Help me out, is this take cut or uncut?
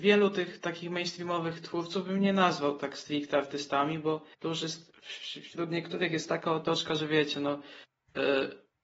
cut